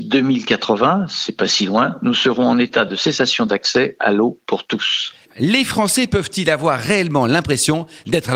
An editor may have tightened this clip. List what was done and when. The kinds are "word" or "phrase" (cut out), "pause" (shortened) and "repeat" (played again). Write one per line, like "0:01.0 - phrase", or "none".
none

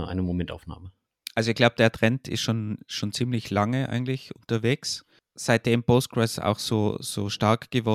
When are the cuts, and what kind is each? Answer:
none

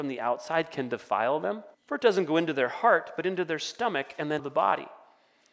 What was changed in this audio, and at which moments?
0:01.7 - pause
0:04.4 - word

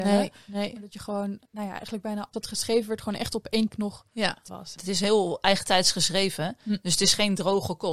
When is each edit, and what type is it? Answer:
0:01.5 - pause
0:02.3 - word
0:03.7 - word
0:04.5 - word

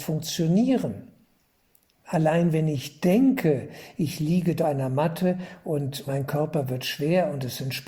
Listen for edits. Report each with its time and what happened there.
0:04.6 - word
0:06.1 - word

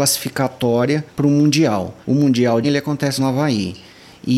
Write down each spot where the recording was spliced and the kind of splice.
0:01.1 - pause
0:02.0 - pause
0:02.6 - phrase
0:03.2 - phrase

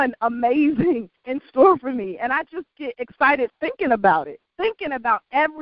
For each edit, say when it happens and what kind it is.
0:01.2 - pause
0:04.5 - pause

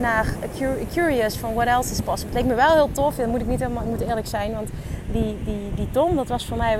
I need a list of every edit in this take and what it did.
none

